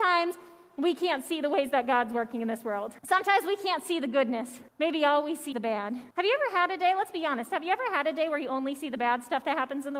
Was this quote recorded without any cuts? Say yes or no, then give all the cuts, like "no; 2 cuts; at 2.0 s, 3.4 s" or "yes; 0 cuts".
no; 4 cuts; at 3.0 s, 4.7 s, 5.5 s, 6.1 s